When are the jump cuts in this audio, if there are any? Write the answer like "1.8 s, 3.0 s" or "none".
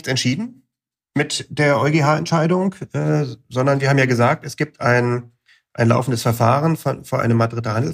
none